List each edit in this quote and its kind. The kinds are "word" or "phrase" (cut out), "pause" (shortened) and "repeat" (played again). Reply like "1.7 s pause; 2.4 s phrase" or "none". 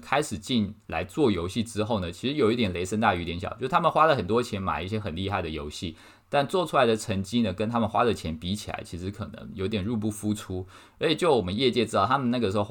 none